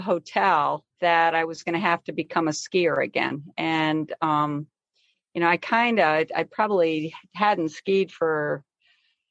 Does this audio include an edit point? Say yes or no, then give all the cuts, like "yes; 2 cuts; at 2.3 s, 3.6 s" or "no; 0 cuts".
yes; 1 cut; at 0.9 s